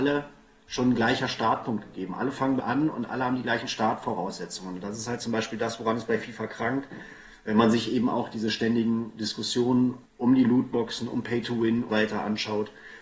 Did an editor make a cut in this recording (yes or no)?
yes